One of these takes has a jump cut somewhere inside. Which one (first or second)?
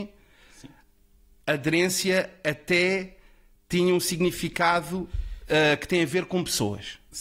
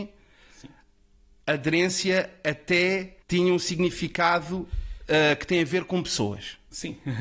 second